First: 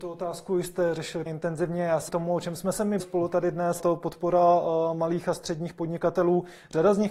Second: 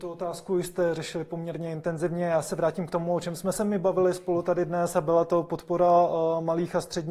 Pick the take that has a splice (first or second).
first